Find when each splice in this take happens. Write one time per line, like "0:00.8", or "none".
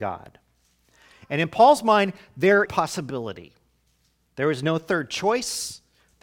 0:02.7